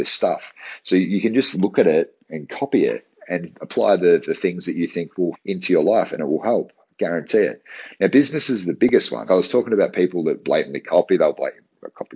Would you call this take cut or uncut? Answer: cut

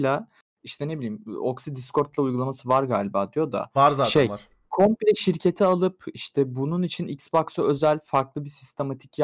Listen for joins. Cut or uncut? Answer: uncut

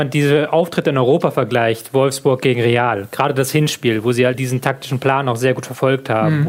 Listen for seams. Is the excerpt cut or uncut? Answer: cut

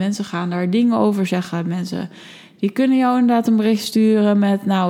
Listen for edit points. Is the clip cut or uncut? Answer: uncut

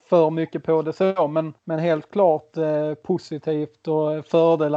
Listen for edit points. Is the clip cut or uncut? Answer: cut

